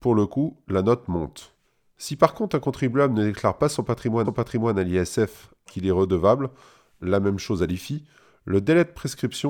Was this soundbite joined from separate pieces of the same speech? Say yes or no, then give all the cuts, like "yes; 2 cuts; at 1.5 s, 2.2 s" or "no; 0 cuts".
yes; 3 cuts; at 1.6 s, 4.2 s, 5.7 s